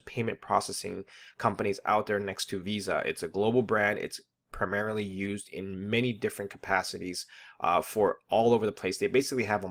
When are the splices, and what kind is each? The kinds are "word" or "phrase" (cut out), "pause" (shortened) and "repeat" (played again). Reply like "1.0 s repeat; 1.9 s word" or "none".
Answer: none